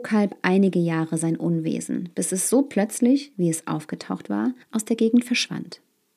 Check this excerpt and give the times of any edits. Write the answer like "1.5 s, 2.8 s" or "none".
4.6 s